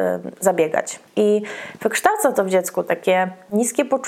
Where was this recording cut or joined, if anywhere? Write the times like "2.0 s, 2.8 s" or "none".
1.1 s